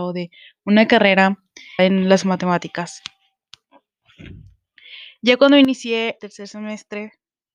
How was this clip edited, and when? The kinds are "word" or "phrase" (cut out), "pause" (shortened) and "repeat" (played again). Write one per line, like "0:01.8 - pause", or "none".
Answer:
0:01.8 - word
0:06.2 - word

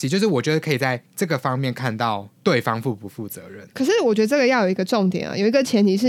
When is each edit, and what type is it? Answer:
0:01.1 - pause
0:02.3 - pause

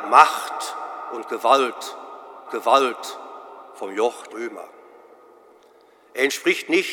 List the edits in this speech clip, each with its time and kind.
0:02.5 - repeat
0:04.3 - word

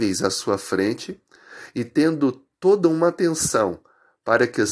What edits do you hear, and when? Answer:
0:02.5 - pause

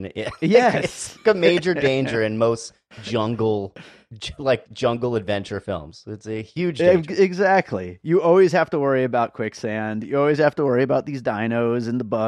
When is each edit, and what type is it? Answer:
none

